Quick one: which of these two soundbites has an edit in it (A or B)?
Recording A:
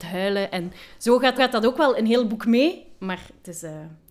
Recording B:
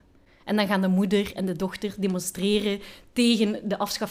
A